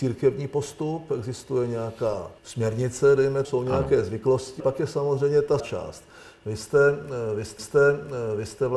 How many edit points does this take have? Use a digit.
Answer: 5